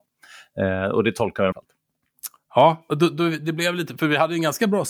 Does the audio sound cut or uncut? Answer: cut